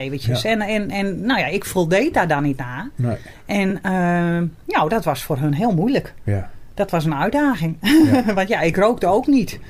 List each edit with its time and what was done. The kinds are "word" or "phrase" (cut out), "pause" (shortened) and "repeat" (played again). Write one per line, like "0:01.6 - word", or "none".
none